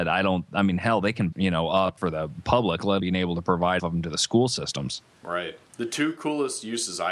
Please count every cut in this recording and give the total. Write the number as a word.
five